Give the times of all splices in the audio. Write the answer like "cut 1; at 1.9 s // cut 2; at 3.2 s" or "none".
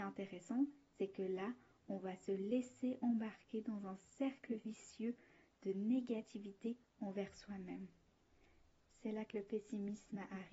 none